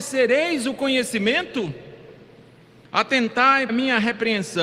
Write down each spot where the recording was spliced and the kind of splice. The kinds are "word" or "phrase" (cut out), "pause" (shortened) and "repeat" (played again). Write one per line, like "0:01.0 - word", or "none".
0:03.7 - word